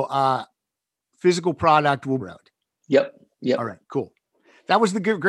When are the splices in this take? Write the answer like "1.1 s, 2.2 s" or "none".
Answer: 2.2 s, 3.8 s